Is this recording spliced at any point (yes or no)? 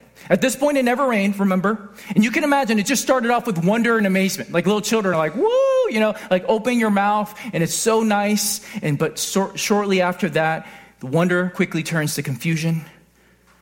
no